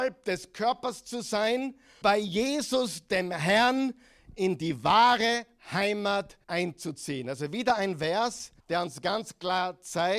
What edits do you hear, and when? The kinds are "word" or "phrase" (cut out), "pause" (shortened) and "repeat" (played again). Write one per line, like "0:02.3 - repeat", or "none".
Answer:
0:02.0 - word
0:06.4 - pause
0:08.6 - pause